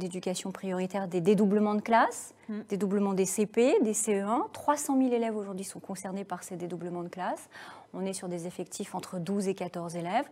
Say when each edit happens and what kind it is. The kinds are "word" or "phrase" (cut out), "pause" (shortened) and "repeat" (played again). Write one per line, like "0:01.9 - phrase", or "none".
none